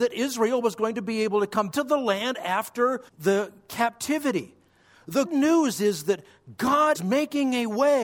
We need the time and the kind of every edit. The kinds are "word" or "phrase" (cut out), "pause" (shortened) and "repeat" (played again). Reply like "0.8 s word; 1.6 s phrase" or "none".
1.7 s word; 3.1 s pause; 5.2 s word; 6.9 s word